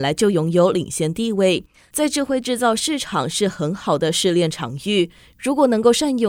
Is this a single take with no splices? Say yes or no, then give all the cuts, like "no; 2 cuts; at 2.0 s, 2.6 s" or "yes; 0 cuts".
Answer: yes; 0 cuts